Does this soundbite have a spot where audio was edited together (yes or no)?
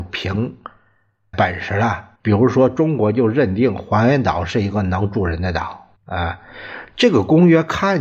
yes